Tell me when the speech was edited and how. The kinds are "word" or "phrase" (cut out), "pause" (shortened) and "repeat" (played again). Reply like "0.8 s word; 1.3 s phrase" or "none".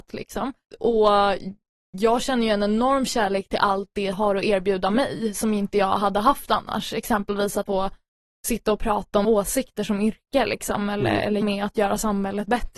4.1 s word; 7.7 s word; 9.2 s word; 11.4 s word